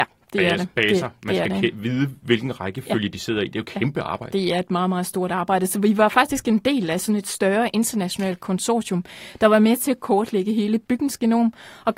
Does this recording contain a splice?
no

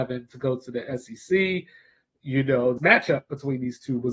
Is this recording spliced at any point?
yes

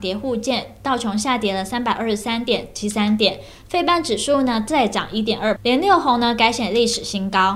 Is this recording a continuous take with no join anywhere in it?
no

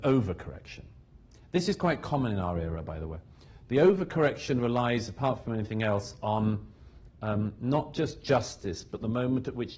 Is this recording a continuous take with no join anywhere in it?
yes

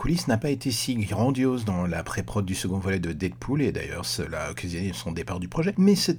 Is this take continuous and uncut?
yes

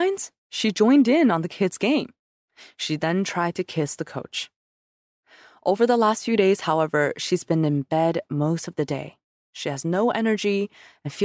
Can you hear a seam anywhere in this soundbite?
no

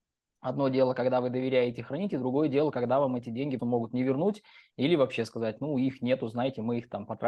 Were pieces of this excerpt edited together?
yes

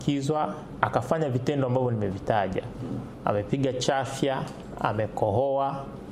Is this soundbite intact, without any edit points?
yes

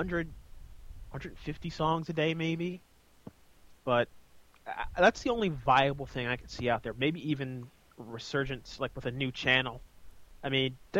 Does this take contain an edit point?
no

